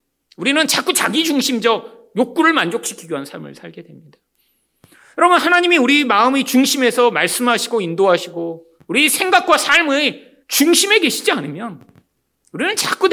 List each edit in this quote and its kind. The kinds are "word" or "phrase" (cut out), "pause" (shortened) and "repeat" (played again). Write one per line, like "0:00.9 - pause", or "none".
0:08.8 - pause
0:10.4 - pause